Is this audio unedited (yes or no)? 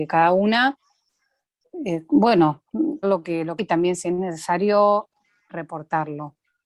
no